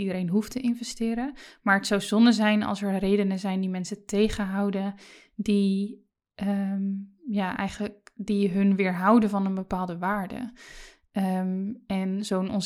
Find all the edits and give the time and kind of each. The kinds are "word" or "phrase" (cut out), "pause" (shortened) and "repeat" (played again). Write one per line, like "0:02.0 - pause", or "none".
none